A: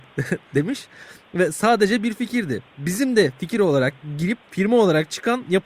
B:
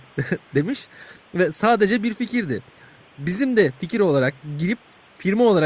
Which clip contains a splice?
A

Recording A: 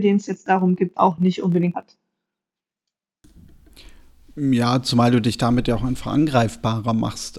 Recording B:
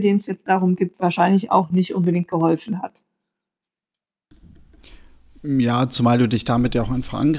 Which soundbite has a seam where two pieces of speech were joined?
A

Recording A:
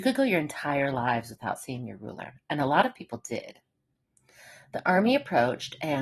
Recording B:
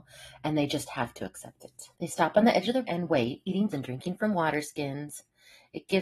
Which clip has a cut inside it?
B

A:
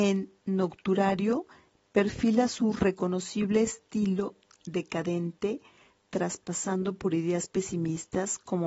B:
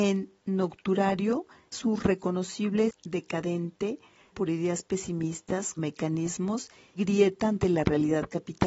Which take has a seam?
B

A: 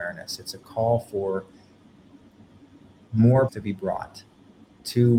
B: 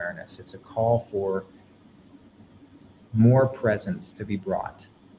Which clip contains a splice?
A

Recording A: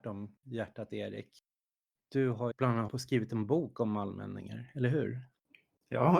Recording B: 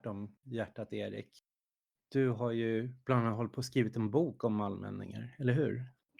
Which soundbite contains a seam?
A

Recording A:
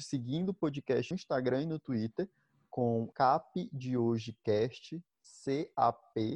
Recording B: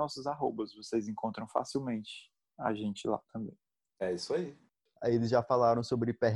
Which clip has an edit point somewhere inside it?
A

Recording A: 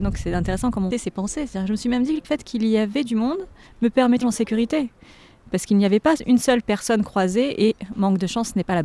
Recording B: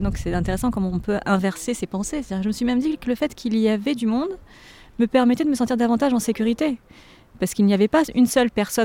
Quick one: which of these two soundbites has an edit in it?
A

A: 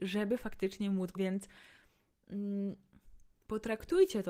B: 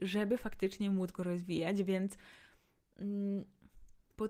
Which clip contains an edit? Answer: A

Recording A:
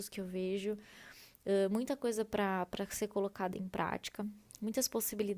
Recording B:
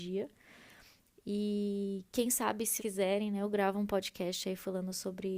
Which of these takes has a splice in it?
B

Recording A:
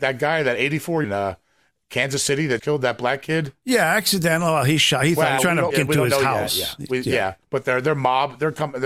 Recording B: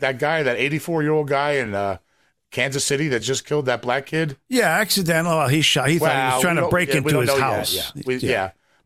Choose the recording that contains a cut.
A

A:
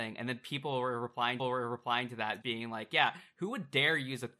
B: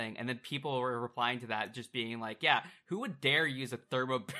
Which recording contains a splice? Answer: A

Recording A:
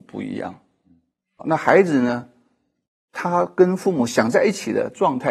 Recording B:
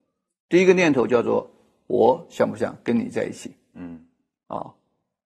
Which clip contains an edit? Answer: A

